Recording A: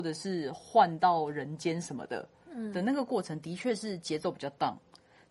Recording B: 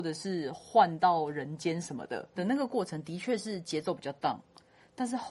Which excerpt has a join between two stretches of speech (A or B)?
B